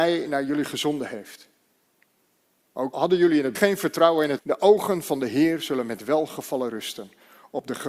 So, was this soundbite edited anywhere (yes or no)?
yes